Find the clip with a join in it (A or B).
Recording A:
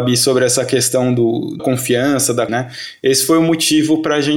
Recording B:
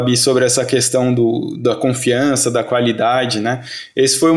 A